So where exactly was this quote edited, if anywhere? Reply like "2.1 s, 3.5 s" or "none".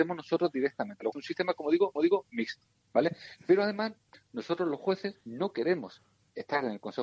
1.1 s, 2.0 s, 5.2 s